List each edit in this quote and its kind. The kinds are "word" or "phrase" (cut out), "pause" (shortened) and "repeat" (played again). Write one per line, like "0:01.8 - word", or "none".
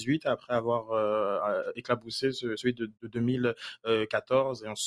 0:02.9 - word